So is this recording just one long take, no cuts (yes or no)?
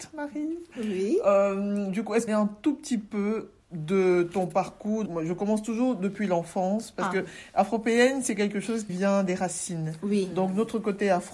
no